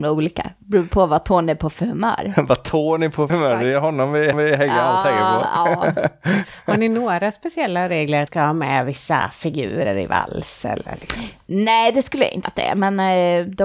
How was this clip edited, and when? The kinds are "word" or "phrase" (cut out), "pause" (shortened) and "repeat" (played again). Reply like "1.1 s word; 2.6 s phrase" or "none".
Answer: 3.3 s word; 4.3 s repeat; 8.3 s word; 12.4 s word